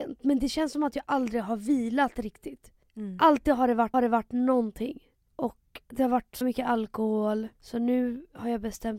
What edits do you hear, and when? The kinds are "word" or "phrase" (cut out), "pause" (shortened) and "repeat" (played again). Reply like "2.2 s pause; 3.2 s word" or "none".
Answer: 3.9 s repeat; 5.8 s pause; 6.4 s word; 7.5 s pause